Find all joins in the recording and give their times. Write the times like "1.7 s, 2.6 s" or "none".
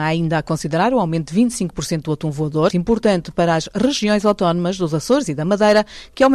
2.7 s